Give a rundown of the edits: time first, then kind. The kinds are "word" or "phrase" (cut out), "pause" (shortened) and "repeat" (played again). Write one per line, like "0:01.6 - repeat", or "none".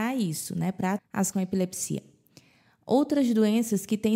0:01.0 - word
0:01.3 - word